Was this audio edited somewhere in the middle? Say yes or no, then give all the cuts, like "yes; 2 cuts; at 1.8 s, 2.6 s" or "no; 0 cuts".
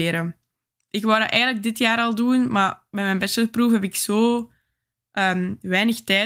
no; 0 cuts